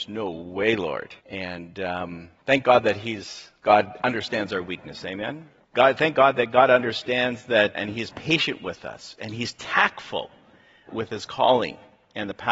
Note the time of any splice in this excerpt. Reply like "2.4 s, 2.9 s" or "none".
1.2 s, 5.6 s, 7.8 s, 10.9 s